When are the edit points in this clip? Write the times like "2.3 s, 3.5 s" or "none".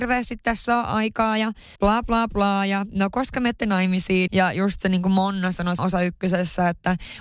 1.8 s, 4.3 s, 5.8 s